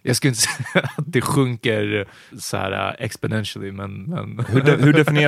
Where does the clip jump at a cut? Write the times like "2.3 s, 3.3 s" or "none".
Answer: 2.3 s